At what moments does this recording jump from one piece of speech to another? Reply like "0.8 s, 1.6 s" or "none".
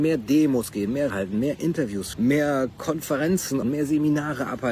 1.1 s, 2.1 s, 3.6 s